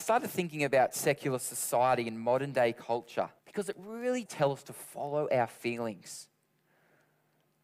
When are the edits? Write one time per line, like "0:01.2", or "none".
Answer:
0:03.4
0:04.3